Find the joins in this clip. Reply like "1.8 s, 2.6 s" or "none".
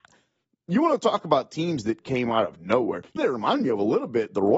2.0 s, 3.2 s